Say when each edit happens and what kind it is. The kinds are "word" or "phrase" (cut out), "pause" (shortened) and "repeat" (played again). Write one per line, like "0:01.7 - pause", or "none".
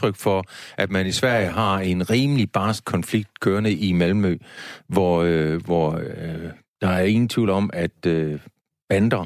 none

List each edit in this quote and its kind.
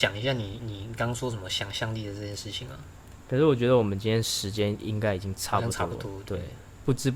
0:03.2 - pause

